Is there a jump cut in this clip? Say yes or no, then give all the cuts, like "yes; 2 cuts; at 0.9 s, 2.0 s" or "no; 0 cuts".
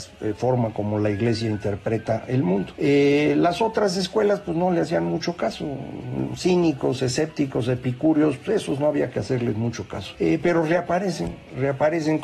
no; 0 cuts